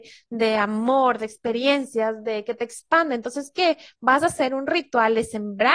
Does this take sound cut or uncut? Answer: uncut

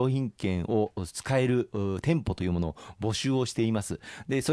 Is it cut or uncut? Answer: uncut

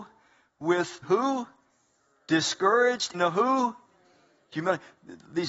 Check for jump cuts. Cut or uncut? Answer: cut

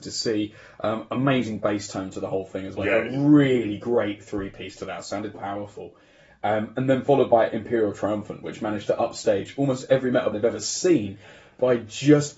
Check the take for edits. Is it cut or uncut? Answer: cut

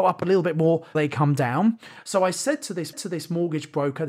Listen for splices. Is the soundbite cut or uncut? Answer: cut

